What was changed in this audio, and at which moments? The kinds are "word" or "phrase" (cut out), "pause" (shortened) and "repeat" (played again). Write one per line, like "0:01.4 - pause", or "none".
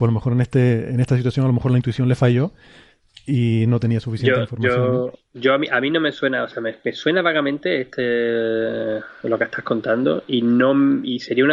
none